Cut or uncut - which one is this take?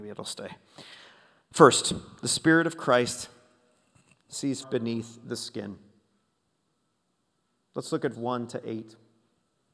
cut